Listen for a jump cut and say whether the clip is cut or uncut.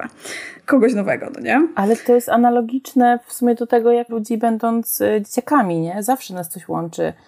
cut